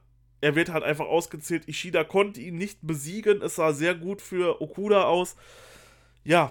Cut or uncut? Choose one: uncut